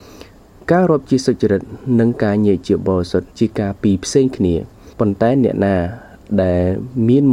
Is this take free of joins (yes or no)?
no